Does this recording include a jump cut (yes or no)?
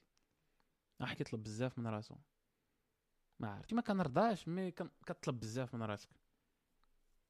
yes